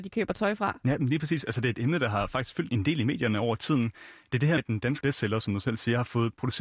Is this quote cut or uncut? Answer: cut